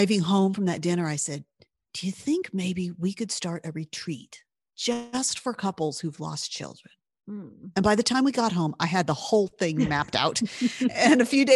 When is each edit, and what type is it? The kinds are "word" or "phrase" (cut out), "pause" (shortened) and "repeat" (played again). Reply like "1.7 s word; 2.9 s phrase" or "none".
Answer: none